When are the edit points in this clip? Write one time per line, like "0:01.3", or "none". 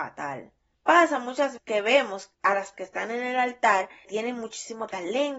0:01.6
0:02.3
0:02.7
0:04.1